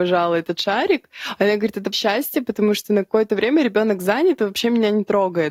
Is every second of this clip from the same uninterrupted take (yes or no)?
no